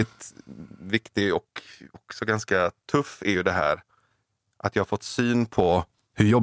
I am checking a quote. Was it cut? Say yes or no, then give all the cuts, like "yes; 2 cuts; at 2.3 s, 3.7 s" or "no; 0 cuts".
no; 0 cuts